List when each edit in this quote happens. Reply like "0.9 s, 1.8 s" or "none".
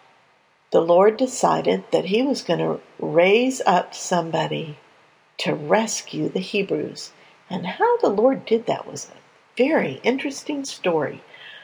none